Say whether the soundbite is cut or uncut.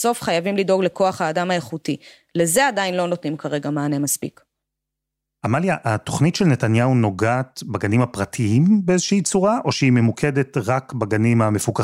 uncut